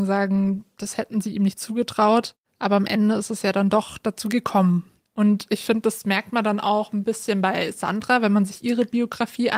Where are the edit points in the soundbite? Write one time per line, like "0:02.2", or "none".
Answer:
none